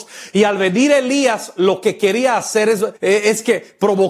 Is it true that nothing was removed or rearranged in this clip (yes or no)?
no